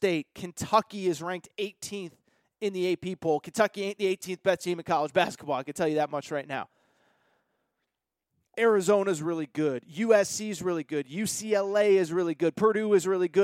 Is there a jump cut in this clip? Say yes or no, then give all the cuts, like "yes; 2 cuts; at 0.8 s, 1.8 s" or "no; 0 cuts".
no; 0 cuts